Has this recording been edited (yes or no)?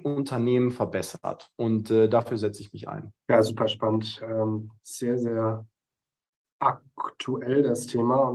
yes